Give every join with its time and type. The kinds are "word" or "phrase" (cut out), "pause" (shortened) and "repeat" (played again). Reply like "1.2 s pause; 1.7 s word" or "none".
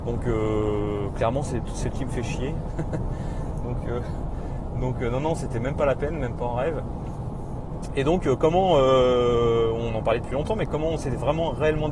1.9 s word